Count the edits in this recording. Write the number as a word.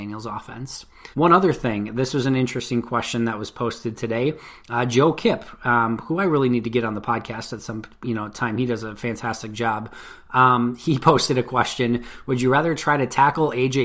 one